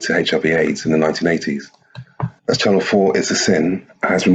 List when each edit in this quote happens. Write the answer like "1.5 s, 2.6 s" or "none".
2.4 s